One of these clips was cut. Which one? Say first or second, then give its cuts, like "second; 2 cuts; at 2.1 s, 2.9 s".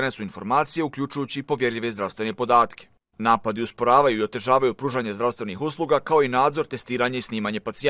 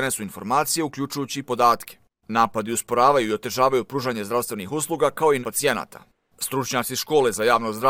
second; 2 cuts; at 1.4 s, 5.4 s